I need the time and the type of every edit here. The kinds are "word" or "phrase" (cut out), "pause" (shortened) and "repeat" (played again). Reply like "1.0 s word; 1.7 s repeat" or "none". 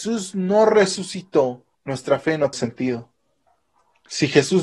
1.7 s pause; 2.5 s word; 3.5 s pause